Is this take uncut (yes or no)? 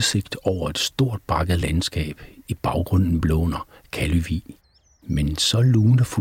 yes